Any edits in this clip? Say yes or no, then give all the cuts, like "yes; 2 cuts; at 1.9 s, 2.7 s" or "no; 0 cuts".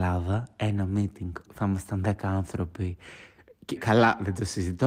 yes; 2 cuts; at 1.5 s, 3.8 s